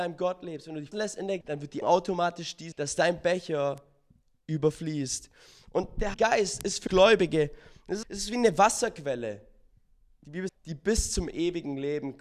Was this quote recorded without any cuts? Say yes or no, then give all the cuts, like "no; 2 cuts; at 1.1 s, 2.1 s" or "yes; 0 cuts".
no; 8 cuts; at 0.9 s, 1.4 s, 1.8 s, 2.7 s, 6.1 s, 6.9 s, 8.0 s, 10.5 s